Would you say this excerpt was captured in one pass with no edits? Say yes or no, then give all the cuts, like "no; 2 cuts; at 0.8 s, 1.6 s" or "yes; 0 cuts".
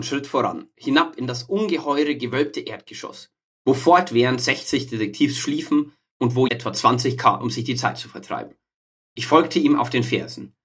no; 2 cuts; at 6.5 s, 7.4 s